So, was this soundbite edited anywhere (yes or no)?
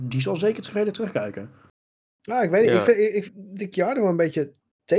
yes